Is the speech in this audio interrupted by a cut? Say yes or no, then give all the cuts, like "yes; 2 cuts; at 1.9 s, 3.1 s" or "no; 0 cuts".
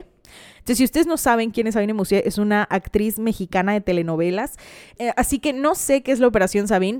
no; 0 cuts